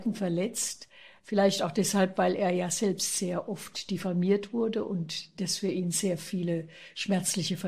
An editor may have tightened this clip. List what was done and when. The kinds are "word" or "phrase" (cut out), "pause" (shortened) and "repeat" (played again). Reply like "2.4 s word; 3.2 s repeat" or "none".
none